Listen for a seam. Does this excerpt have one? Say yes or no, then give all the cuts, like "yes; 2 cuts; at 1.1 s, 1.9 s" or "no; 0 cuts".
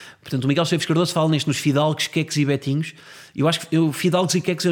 no; 0 cuts